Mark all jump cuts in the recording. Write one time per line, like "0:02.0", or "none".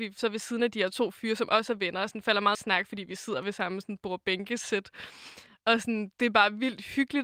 0:02.5